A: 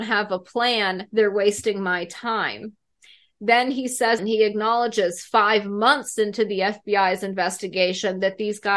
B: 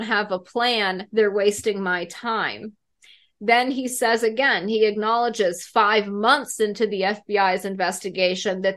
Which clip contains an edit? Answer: A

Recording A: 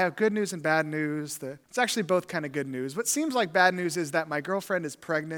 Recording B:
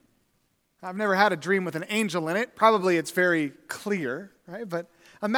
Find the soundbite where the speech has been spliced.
A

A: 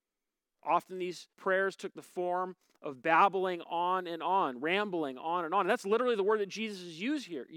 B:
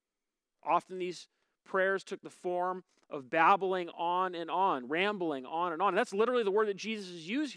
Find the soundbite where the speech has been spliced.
A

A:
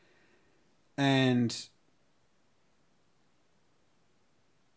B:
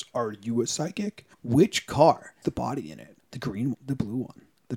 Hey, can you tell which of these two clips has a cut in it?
B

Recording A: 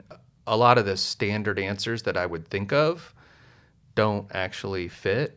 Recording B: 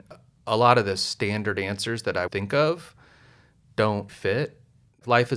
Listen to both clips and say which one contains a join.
B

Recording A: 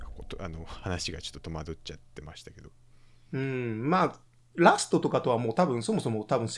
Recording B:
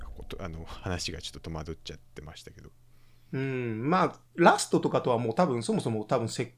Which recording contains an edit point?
B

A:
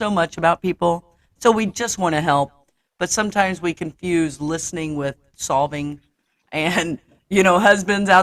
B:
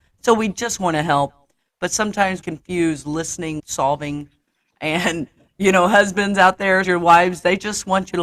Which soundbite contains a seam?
B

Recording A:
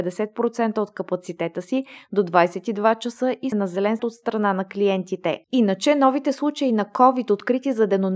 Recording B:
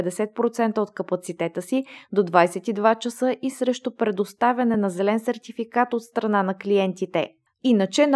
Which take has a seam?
A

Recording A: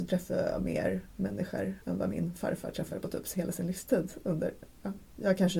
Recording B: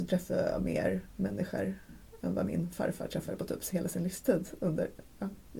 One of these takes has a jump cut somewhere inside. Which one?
A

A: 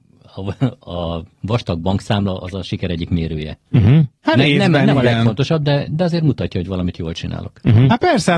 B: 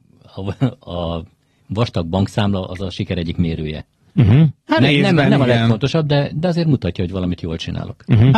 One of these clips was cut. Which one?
A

